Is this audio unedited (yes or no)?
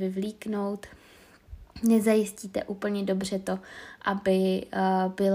yes